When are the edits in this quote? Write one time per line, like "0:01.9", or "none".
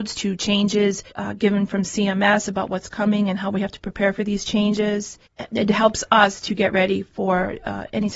0:01.1
0:05.3